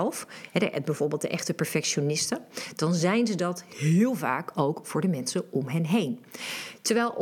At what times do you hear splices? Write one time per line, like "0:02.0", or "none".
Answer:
none